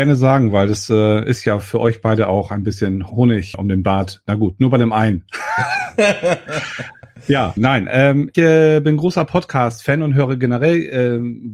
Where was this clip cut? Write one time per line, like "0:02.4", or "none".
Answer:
0:03.1
0:03.5
0:07.6
0:08.3